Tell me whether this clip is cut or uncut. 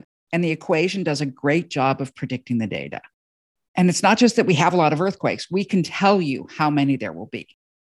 uncut